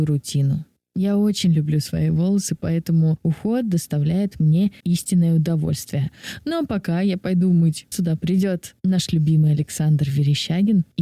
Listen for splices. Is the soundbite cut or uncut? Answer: cut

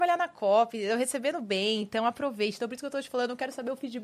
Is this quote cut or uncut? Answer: uncut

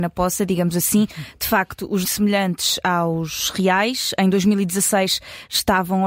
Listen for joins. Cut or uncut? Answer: cut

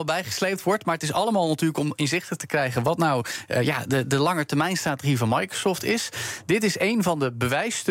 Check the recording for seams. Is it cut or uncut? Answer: uncut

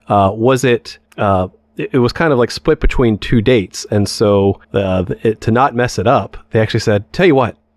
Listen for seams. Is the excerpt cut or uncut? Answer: cut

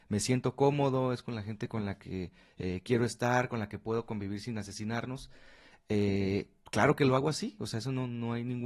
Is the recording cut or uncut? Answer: uncut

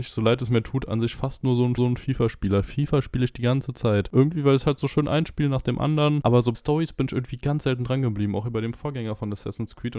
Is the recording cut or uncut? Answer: cut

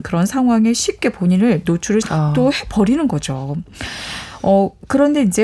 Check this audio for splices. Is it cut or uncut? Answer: cut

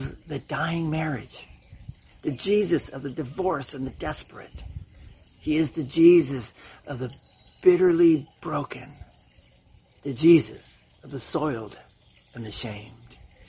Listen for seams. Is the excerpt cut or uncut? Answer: cut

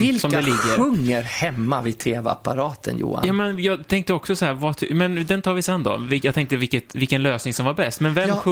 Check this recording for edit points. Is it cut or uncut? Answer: uncut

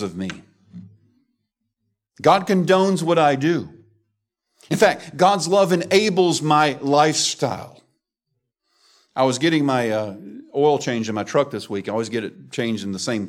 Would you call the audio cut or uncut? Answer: uncut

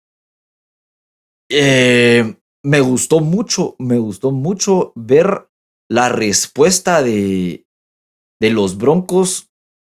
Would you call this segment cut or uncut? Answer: uncut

